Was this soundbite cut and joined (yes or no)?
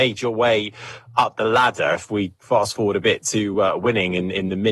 no